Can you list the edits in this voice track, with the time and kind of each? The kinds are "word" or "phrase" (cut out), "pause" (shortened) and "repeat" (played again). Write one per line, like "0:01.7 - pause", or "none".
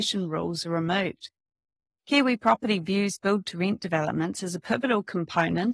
none